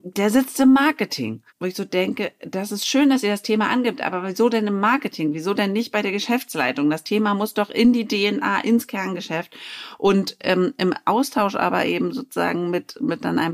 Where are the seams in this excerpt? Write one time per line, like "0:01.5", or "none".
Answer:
0:01.5